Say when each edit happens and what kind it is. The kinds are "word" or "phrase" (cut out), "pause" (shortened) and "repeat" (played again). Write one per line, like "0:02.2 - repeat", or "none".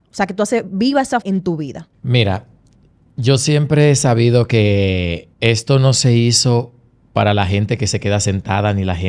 0:01.2 - word
0:01.9 - pause
0:05.3 - pause